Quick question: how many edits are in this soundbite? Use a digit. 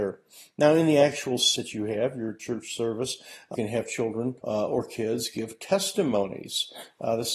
3